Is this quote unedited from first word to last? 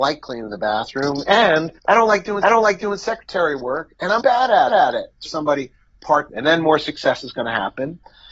no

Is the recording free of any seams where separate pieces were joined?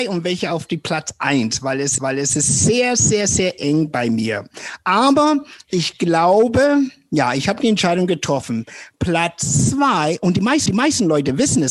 no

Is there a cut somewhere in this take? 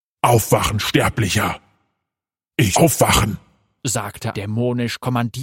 yes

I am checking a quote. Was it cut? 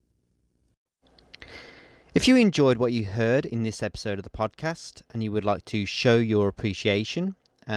no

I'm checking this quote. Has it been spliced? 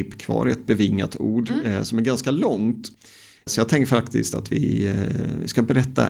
no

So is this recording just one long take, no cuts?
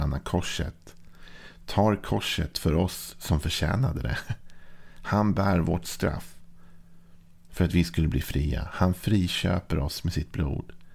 yes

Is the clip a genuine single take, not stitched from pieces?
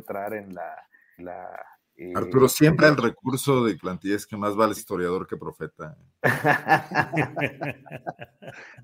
no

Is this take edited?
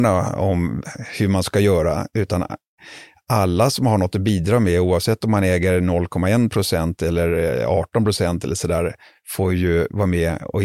no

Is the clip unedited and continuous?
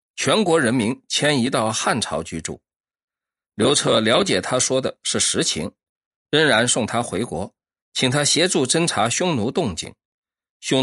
yes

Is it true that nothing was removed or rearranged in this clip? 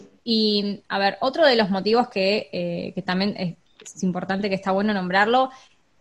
yes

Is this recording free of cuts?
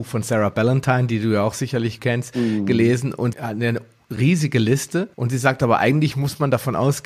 no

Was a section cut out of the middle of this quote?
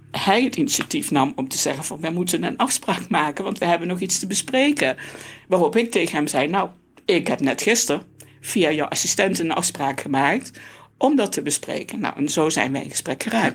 no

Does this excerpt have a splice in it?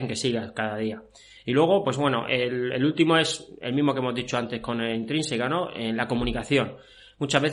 no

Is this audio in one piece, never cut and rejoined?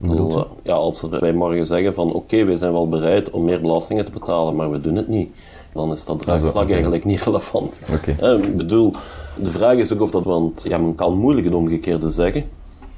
no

